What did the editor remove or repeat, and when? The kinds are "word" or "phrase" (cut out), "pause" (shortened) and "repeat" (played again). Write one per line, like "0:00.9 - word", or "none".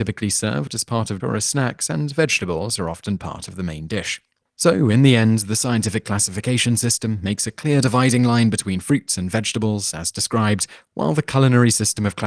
0:01.2 - word